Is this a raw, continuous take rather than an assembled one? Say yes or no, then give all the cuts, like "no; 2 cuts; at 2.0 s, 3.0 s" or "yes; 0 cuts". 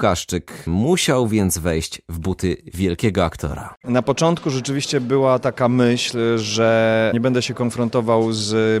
yes; 0 cuts